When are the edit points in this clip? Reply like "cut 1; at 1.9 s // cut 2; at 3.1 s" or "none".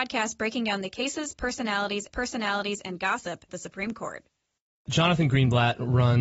cut 1; at 2.1 s // cut 2; at 3.5 s // cut 3; at 4.6 s